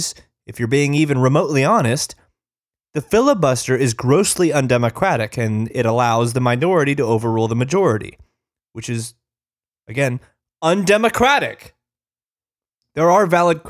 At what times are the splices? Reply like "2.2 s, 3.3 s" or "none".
none